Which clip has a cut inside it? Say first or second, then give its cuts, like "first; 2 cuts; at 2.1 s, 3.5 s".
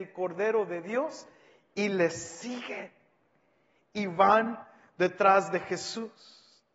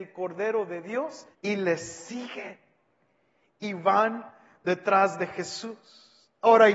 second; 1 cut; at 1.3 s